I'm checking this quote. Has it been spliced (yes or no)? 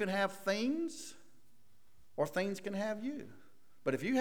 no